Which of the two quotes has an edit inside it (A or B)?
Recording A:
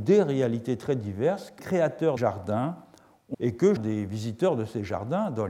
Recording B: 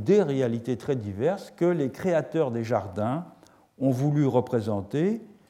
A